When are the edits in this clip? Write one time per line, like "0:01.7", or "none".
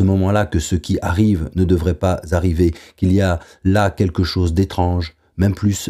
none